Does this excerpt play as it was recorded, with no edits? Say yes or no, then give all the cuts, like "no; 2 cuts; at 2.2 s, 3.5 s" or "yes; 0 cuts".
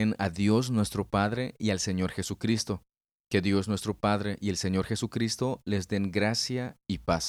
yes; 0 cuts